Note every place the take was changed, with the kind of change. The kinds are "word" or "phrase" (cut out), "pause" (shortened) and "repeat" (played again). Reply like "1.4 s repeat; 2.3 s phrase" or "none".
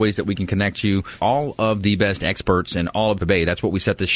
1.2 s word; 3.2 s word